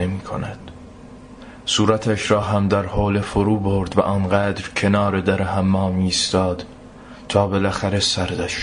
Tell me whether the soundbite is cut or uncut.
uncut